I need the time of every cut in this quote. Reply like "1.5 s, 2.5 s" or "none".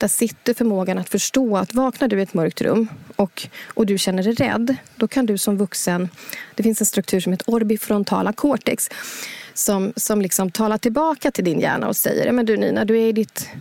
none